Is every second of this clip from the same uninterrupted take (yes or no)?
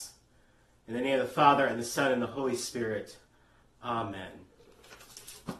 yes